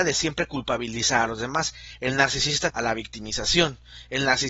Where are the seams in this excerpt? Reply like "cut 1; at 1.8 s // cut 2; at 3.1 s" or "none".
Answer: cut 1; at 2.7 s